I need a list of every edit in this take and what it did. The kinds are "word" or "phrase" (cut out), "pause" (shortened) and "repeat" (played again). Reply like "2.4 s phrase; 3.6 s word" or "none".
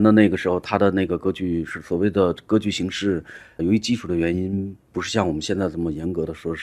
3.6 s word